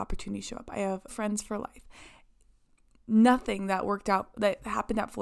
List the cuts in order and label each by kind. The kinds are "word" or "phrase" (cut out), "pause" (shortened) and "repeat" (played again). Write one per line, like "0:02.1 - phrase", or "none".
0:01.1 - word